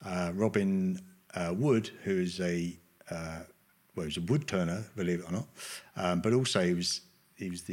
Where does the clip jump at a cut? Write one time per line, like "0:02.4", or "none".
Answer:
none